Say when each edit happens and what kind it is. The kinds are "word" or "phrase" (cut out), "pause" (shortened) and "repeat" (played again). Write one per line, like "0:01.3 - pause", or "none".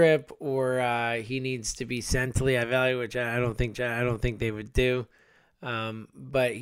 0:03.7 - repeat